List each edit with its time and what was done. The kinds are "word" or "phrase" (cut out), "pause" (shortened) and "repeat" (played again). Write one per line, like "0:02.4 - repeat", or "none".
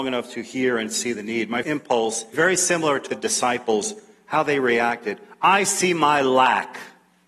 0:01.6 - word
0:02.3 - word
0:03.1 - word

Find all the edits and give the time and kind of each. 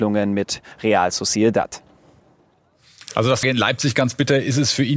0:03.4 - word

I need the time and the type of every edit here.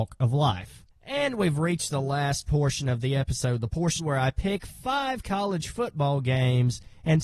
0:04.0 - phrase

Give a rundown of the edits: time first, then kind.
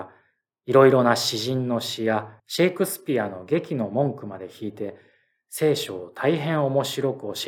0:02.4 - pause

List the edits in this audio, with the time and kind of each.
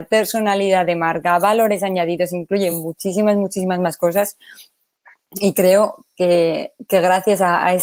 none

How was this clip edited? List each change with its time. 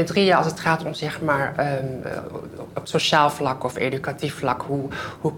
none

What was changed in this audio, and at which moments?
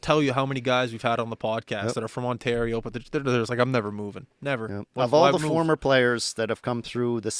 none

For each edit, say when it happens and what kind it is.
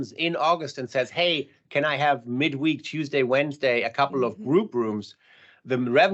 none

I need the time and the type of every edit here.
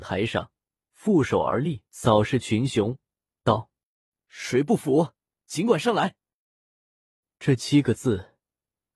0:01.9 - pause

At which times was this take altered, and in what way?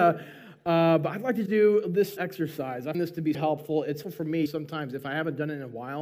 0:01.5 - word
0:02.2 - word
0:02.9 - word
0:03.3 - word
0:04.0 - word
0:04.5 - word

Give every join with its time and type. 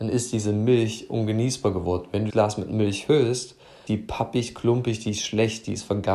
0:02.3 - word
0:03.9 - phrase

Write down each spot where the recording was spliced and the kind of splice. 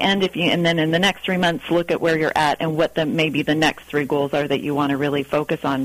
none

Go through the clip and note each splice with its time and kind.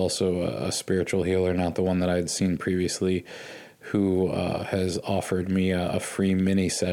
none

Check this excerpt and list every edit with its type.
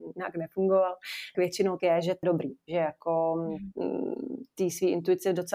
0:01.3 - word
0:01.8 - word
0:02.2 - word

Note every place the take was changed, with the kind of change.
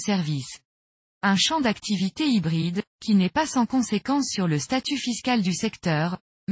none

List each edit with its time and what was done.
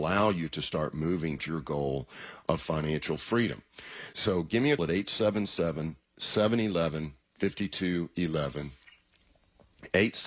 0:01.4 - word
0:04.8 - word

